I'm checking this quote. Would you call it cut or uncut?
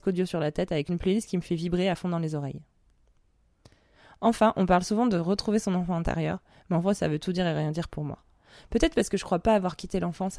uncut